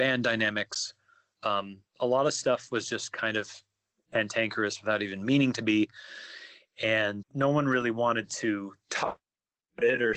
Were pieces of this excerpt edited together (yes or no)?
yes